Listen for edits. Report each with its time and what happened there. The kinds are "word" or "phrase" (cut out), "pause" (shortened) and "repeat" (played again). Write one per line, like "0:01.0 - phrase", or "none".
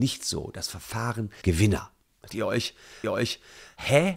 0:01.4 - word
0:02.3 - word
0:03.0 - repeat